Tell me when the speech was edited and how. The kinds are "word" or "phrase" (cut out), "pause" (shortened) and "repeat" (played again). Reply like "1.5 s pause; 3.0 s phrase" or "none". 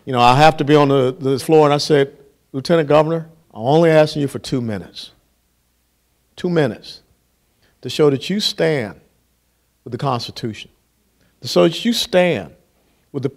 1.4 s word; 3.4 s pause